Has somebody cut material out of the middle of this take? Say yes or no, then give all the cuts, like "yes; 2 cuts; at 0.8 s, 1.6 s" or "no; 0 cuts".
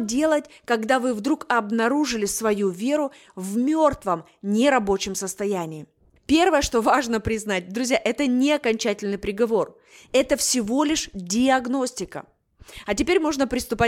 no; 0 cuts